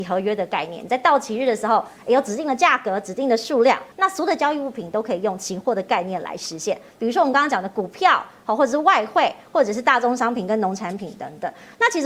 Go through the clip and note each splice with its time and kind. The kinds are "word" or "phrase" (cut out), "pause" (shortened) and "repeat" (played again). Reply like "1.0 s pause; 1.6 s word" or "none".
3.9 s pause